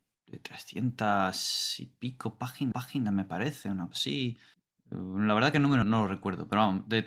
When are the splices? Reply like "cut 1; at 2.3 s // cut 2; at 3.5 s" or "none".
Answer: cut 1; at 2.7 s // cut 2; at 3.9 s // cut 3; at 4.5 s // cut 4; at 5.8 s